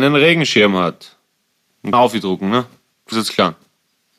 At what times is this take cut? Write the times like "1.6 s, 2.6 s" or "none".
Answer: 1.9 s, 3.1 s